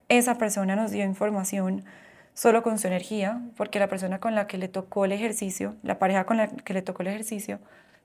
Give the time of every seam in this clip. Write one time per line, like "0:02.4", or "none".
none